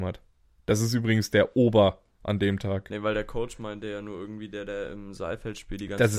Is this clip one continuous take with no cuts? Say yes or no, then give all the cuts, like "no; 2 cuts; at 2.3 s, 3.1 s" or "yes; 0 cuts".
yes; 0 cuts